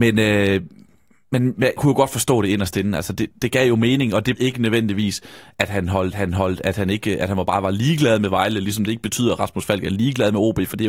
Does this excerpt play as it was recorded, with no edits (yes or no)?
no